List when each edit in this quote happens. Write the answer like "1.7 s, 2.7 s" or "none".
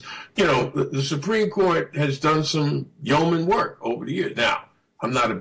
none